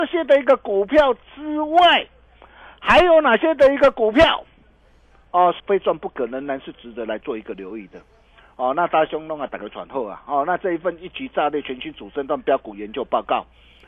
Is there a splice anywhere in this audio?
yes; 1 cut; at 5.6 s

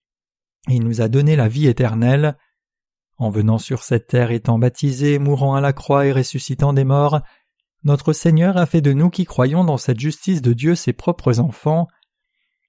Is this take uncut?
yes; 0 cuts

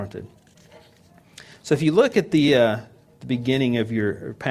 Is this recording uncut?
yes; 0 cuts

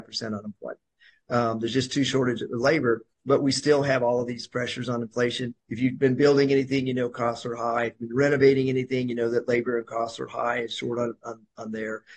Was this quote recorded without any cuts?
no; 2 cuts; at 3.1 s, 5.6 s

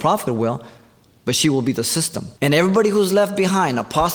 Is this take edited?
yes; 1 cut; at 2.4 s

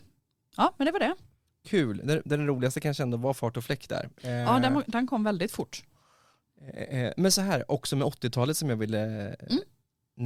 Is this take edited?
no; 0 cuts

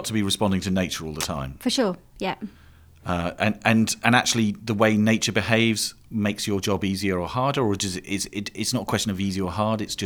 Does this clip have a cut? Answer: no; 0 cuts

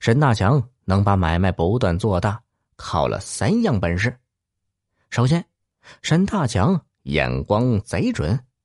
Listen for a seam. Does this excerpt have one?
no; 0 cuts

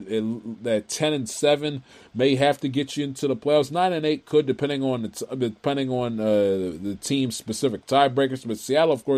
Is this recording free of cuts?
yes; 0 cuts

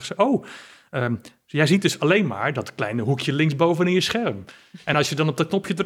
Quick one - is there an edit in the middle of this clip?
no; 0 cuts

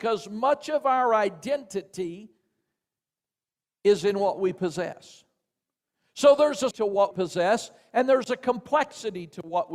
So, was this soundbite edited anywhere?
yes; 2 cuts; at 6.7 s, 7.1 s

